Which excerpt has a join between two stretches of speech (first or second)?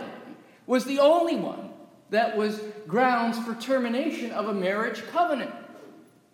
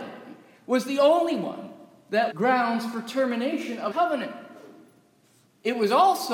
second